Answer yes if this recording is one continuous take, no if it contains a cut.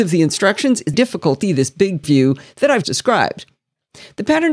no